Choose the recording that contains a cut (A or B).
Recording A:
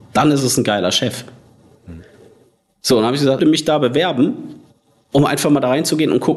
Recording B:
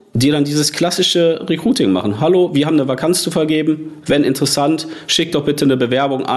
A